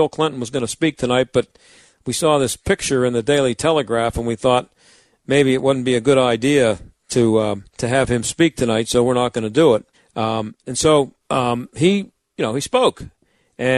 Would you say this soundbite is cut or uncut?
cut